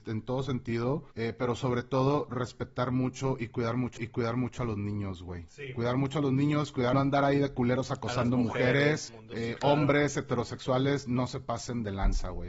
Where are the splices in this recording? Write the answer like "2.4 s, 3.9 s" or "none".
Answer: 1.1 s, 4.0 s, 6.9 s, 9.1 s